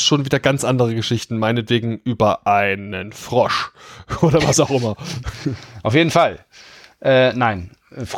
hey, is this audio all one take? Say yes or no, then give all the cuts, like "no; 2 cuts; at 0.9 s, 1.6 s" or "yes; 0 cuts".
yes; 0 cuts